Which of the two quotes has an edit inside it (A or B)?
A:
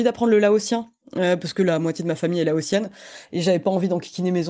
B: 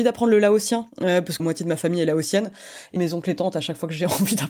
B